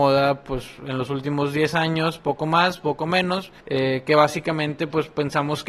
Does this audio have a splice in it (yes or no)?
yes